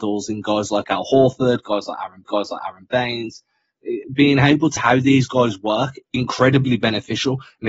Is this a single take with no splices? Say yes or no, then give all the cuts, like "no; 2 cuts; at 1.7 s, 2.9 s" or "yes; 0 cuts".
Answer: no; 3 cuts; at 2.2 s, 4.8 s, 6.1 s